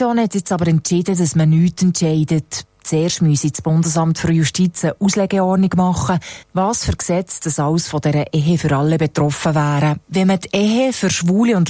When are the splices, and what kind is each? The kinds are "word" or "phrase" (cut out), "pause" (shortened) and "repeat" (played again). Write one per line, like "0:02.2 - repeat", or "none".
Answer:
0:06.4 - pause
0:10.0 - pause

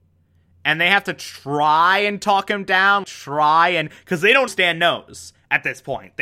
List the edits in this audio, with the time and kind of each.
0:03.0 - word
0:04.5 - word

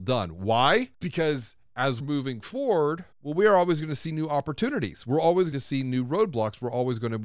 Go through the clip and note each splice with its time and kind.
0:00.9 - pause
0:02.0 - word
0:03.1 - pause
0:05.5 - word

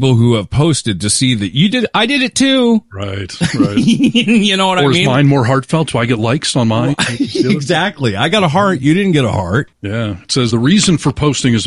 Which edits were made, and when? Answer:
0:10.5 - word

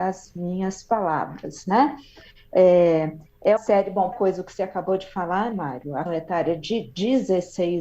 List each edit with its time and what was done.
0:03.6 - word
0:04.1 - word
0:05.5 - word
0:06.1 - word

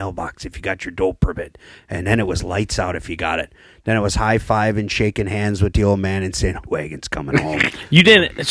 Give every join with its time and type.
0:06.6 - phrase

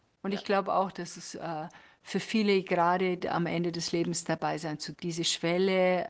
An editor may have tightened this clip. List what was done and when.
0:04.9 - word

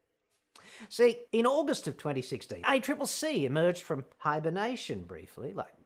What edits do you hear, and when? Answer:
0:01.3 - pause
0:02.6 - word
0:04.1 - pause

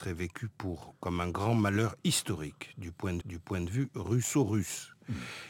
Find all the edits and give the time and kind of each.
0:03.2 - repeat

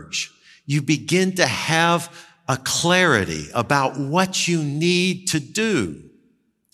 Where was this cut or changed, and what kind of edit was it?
none

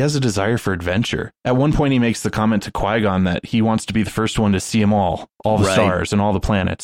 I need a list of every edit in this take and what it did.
0:01.4 - pause

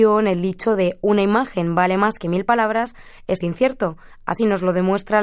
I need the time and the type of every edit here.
0:03.4 - word

